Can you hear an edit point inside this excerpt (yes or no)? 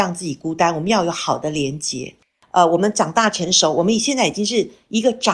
no